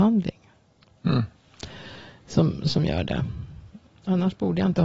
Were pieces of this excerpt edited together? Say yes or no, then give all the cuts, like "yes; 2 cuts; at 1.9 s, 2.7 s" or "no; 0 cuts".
no; 0 cuts